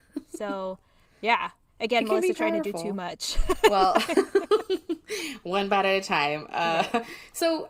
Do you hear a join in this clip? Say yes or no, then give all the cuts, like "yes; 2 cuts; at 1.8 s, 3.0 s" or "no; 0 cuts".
no; 0 cuts